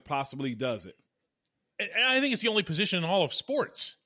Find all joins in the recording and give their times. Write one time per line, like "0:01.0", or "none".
none